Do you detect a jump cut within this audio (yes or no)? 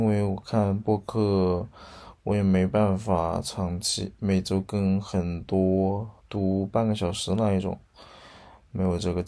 yes